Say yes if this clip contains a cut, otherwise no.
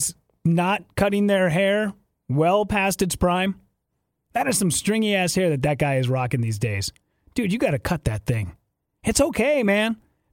no